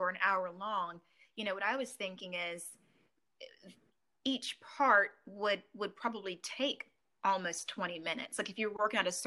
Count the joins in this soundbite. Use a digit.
0